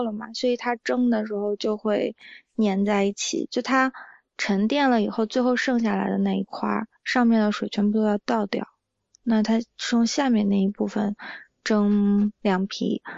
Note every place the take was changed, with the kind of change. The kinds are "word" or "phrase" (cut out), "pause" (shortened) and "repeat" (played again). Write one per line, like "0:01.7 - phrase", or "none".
none